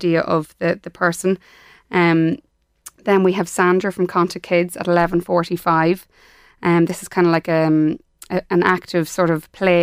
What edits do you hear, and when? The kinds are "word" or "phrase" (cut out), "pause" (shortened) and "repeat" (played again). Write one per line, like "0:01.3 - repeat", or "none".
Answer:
none